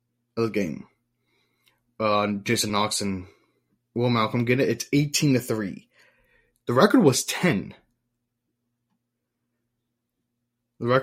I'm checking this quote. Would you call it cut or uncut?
uncut